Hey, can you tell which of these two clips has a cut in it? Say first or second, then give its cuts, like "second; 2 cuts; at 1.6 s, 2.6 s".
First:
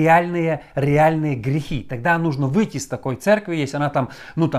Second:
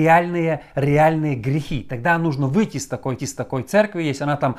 second; 1 cut; at 3.2 s